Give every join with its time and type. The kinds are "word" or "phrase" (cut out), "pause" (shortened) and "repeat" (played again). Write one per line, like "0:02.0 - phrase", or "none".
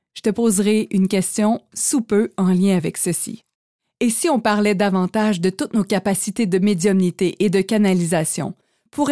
none